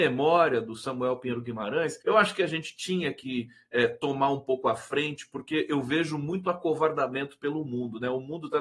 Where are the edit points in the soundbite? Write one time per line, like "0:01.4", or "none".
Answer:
0:02.0